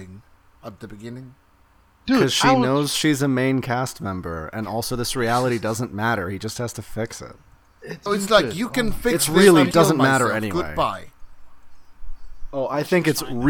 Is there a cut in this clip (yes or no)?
yes